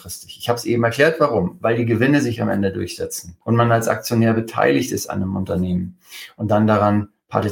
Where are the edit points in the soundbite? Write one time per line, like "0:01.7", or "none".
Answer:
0:03.4